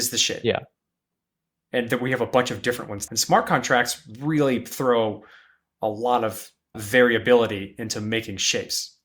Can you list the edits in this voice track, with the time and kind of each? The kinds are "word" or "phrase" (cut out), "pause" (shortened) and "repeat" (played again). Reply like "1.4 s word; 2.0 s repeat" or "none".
3.1 s word; 6.7 s word

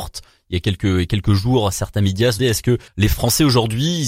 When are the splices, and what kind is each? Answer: 2.4 s word; 2.9 s pause

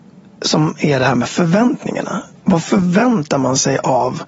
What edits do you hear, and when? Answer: none

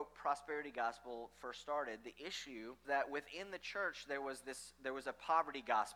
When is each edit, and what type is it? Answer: 2.8 s word

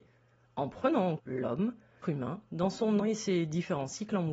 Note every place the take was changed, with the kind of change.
1.2 s word; 2.0 s word; 3.0 s word

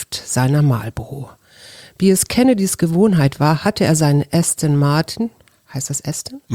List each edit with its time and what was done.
none

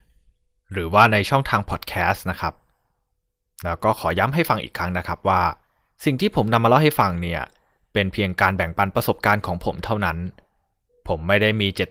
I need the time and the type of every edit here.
none

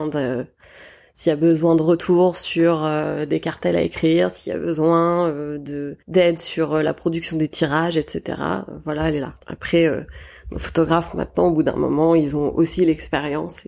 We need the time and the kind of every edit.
6.0 s pause; 9.4 s pause

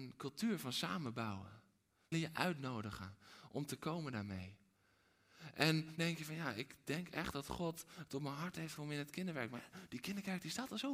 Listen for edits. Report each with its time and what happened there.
2.1 s word; 6.0 s word; 8.8 s word

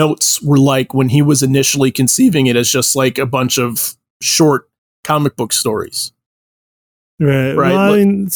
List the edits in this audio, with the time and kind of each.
none

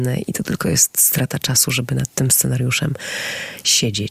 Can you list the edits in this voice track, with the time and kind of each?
none

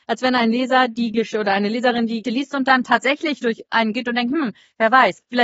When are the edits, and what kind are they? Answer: 2.2 s word; 3.9 s word

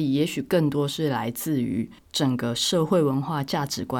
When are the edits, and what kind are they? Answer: 2.0 s pause

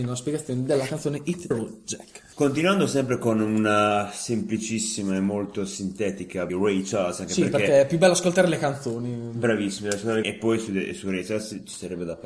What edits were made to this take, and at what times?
1.5 s word; 2.3 s pause; 6.5 s phrase; 10.2 s word

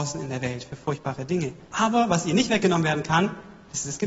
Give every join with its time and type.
1.6 s pause

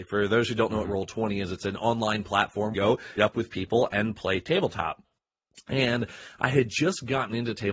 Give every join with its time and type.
2.7 s phrase; 3.2 s phrase

